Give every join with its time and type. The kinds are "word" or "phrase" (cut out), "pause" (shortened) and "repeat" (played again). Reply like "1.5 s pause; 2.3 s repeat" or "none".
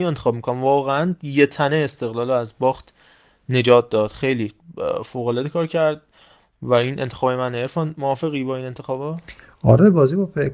none